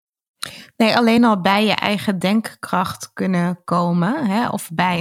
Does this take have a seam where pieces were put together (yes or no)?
no